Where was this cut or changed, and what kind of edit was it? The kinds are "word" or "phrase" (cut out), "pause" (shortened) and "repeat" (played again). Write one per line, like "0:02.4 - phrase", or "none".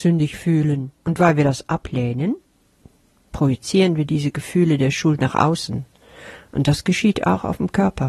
0:00.9 - pause